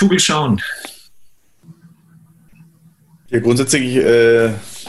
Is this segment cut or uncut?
uncut